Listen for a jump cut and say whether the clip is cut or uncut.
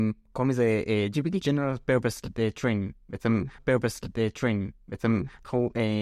cut